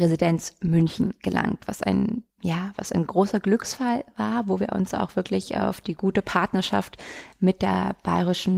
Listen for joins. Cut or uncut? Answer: cut